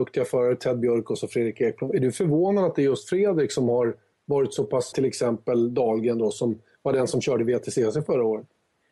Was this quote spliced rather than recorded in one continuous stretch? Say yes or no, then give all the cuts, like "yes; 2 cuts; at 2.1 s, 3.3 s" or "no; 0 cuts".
yes; 1 cut; at 4.9 s